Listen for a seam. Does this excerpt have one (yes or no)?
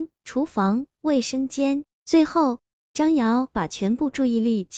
no